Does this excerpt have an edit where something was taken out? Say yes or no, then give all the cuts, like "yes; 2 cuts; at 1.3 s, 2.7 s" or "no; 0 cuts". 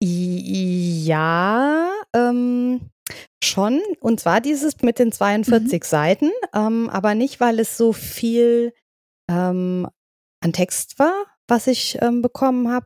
no; 0 cuts